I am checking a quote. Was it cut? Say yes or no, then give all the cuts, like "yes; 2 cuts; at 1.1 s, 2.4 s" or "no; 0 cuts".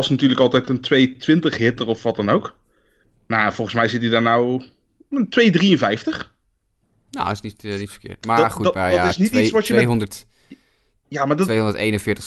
no; 0 cuts